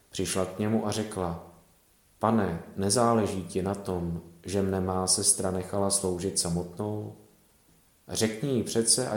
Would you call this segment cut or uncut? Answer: uncut